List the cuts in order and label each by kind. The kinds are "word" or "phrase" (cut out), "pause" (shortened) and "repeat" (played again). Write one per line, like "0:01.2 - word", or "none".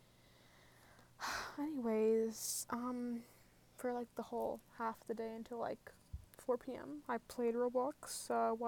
none

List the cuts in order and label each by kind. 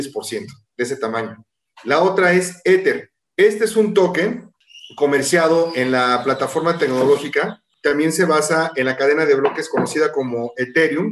none

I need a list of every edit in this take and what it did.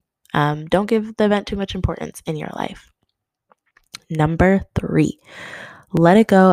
none

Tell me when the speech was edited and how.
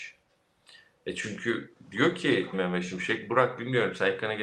0:02.5 - word

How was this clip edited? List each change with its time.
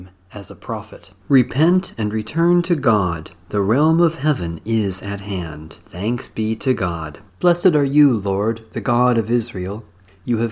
0:01.2 - pause
0:03.4 - pause
0:05.8 - pause
0:07.3 - pause

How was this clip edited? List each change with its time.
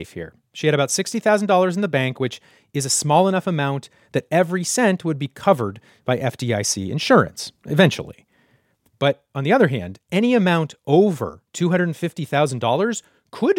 none

